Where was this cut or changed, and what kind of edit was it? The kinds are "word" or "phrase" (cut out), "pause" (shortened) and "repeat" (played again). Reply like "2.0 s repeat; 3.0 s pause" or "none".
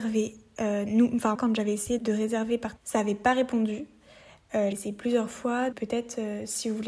1.3 s word; 2.0 s word; 2.8 s word; 4.7 s word; 5.7 s word

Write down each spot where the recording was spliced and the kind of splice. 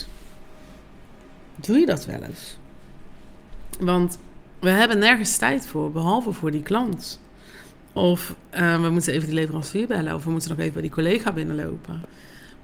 none

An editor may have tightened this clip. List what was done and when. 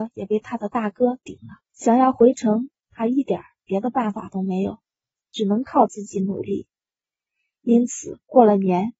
1.7 s pause

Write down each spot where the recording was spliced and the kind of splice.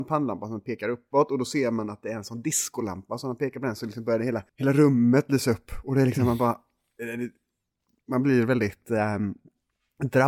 4.5 s pause

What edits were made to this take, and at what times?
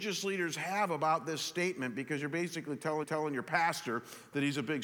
3.0 s repeat

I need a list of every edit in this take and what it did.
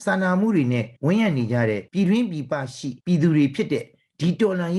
1.0 s pause; 1.9 s pause; 3.0 s pause

